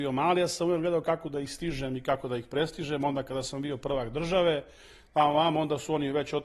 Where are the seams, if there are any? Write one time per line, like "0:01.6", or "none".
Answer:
none